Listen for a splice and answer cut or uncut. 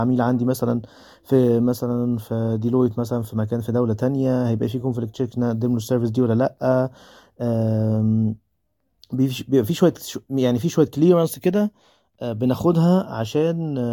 uncut